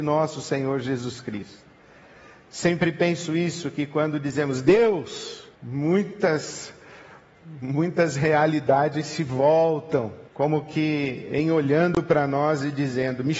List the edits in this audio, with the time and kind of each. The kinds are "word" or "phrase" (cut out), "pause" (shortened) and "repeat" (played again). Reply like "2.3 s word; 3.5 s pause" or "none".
5.5 s pause; 10.3 s pause